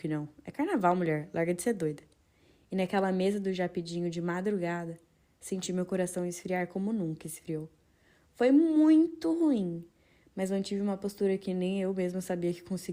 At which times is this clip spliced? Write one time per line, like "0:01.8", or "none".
none